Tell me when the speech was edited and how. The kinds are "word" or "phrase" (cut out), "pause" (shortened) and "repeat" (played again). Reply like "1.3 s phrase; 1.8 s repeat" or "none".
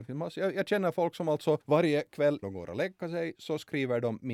1.6 s pause; 2.4 s word